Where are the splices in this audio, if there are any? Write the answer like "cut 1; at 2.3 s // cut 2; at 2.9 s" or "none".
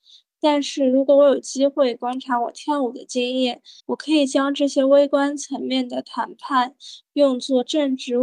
cut 1; at 3.8 s